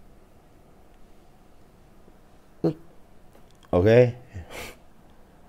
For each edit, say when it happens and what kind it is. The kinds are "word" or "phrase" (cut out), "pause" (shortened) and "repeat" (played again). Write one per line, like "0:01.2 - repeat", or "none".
0:03.3 - pause